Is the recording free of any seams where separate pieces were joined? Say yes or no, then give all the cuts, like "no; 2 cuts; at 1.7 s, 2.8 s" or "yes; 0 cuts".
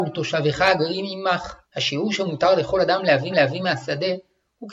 no; 2 cuts; at 1.6 s, 3.3 s